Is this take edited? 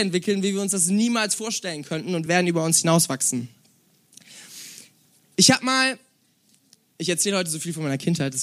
no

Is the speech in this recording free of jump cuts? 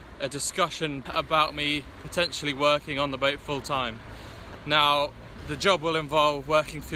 no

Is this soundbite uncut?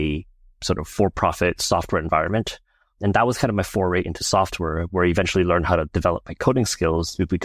yes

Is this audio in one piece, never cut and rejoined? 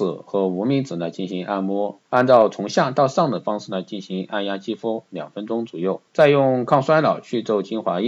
no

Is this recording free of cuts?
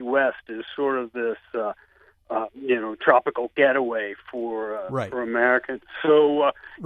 yes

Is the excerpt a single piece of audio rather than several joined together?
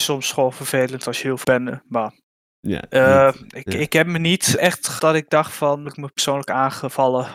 no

